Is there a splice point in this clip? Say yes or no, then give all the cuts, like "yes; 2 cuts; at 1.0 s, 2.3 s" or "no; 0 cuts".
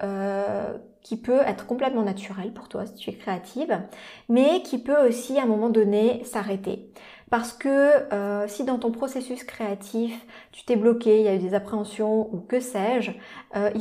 no; 0 cuts